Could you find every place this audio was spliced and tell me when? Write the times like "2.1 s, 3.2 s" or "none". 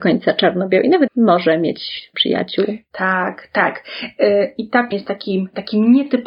1.1 s, 2.1 s, 4.9 s